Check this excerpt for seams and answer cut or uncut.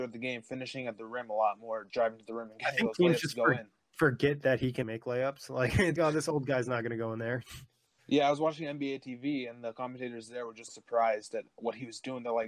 cut